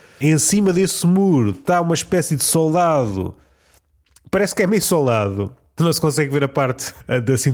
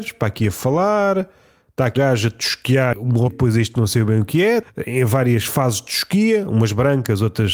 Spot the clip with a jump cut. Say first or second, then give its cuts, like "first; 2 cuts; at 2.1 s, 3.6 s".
second; 3 cuts; at 2.0 s, 3.3 s, 3.7 s